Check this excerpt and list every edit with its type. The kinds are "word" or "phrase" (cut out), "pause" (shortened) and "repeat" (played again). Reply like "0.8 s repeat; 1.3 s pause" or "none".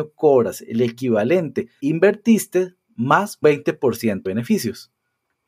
1.8 s phrase; 3.4 s word; 4.3 s word

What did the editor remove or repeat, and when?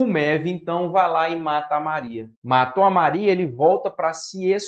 2.3 s pause

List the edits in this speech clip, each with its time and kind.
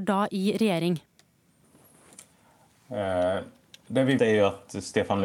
4.2 s word

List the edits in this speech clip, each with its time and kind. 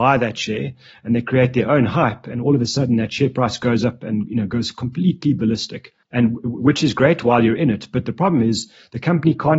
6.0 s pause

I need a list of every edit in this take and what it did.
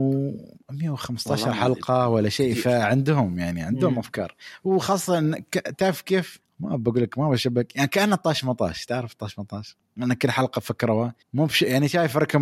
11.2 s pause

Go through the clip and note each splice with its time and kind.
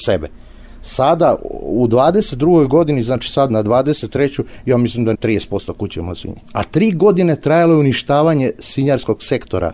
5.1 s word; 6.4 s pause

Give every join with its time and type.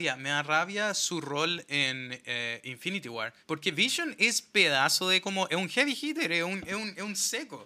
3.4 s pause

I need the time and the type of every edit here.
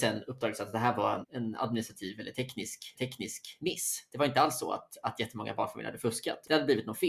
1.2 s word; 2.9 s repeat

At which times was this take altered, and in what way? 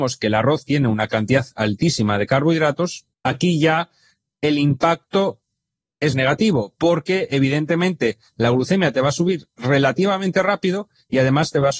3.1 s pause; 6.1 s word

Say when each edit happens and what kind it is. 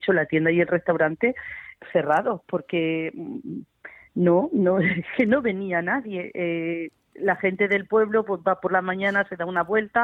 none

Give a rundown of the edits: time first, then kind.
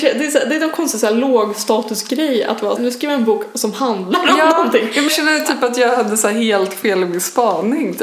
2.8 s word; 5.1 s word

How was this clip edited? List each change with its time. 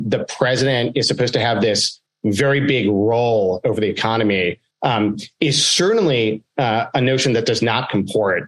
none

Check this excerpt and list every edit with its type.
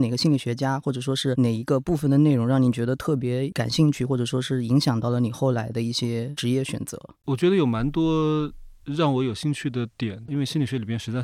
7.2 s pause

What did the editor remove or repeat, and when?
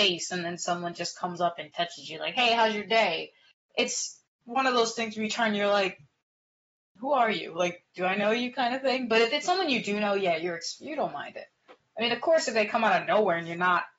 none

